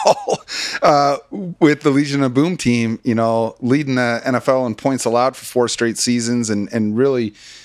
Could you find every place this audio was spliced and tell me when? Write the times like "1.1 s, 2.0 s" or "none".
none